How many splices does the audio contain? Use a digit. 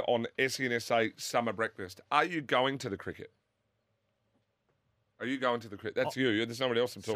0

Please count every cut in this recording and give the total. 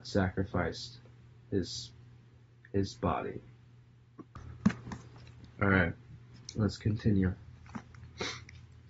0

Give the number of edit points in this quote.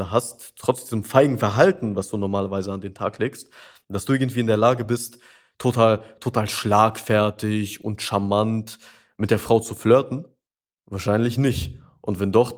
0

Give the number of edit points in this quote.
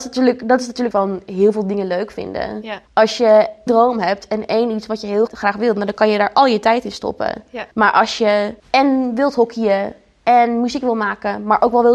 6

